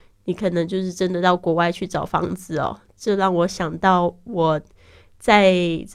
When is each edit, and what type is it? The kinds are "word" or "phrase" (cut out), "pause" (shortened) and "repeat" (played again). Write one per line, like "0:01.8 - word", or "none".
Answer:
none